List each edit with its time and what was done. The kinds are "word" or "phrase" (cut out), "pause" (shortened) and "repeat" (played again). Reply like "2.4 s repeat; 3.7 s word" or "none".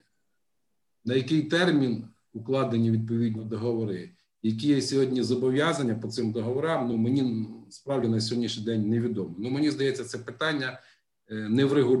none